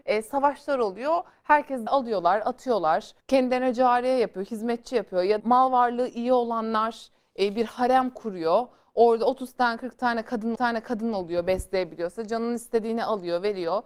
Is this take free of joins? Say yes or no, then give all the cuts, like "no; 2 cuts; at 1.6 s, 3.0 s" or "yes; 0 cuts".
no; 4 cuts; at 1.9 s, 3.2 s, 5.4 s, 10.5 s